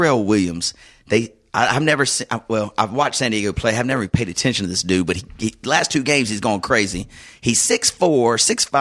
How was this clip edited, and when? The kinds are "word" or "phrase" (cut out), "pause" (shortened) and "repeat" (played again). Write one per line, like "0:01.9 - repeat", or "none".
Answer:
none